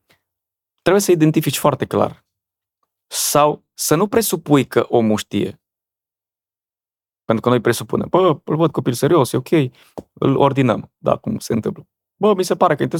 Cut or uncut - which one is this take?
uncut